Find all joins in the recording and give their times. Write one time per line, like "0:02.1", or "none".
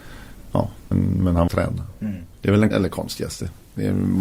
0:00.9
0:01.5
0:02.3
0:02.7